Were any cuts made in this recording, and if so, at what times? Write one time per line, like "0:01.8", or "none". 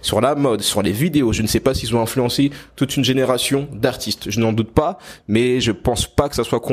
none